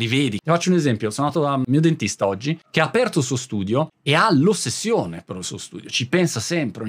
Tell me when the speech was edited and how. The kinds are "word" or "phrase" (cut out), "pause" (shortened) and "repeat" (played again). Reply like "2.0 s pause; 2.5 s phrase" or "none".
none